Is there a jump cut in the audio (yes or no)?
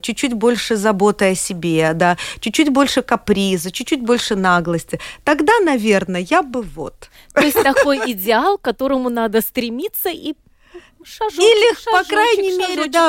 no